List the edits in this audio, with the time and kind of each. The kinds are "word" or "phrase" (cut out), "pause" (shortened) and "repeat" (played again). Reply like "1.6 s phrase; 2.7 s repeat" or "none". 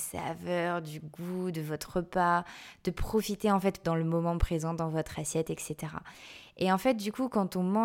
3.8 s phrase